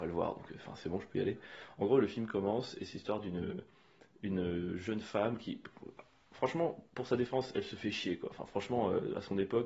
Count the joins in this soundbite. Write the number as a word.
zero